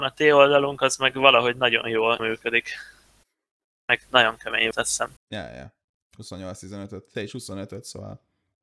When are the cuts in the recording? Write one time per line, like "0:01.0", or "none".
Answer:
0:02.2
0:04.1
0:04.7
0:05.2
0:07.1